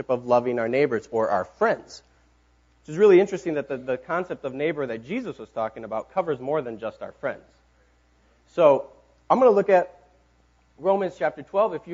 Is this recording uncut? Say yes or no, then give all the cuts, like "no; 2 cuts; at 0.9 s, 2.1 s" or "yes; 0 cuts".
yes; 0 cuts